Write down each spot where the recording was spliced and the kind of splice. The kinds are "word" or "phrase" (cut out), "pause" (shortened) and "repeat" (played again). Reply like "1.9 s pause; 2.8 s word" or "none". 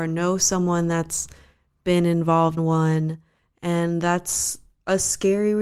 2.6 s word